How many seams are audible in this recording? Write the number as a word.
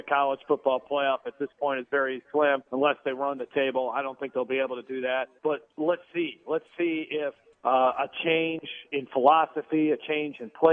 three